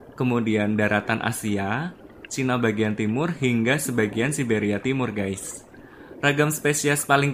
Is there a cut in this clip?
no; 0 cuts

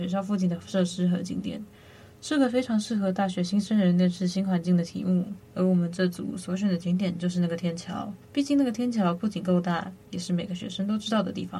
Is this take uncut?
no; 2 cuts; at 5.4 s, 8.2 s

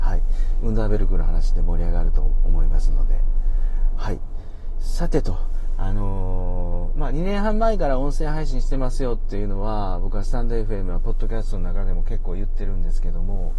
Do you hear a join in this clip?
no; 0 cuts

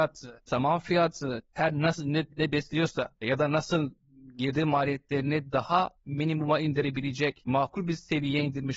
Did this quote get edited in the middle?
no; 0 cuts

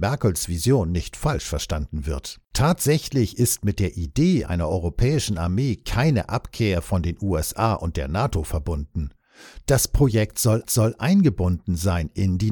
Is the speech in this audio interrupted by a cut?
yes; 2 cuts; at 2.5 s, 10.6 s

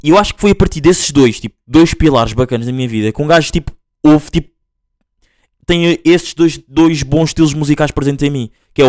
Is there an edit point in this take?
no; 0 cuts

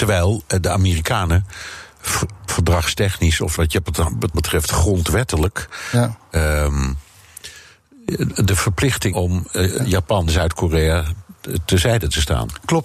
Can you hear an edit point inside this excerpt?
yes; 6 cuts; at 2.5 s, 3.5 s, 4.3 s, 9.1 s, 10.3 s, 11.6 s

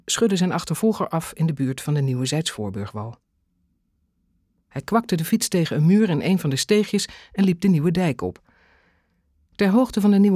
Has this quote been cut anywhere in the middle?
no; 0 cuts

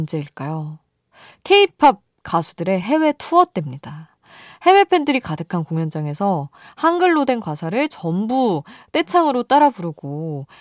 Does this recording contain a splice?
no; 0 cuts

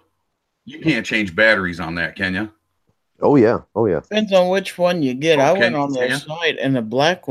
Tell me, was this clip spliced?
no; 0 cuts

